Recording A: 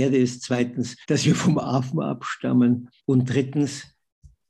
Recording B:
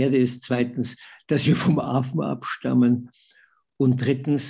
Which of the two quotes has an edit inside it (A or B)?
A